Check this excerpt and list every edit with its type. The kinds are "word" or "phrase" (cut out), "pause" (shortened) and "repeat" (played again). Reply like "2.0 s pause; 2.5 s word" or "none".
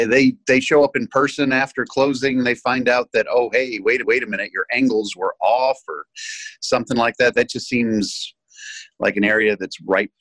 4.0 s repeat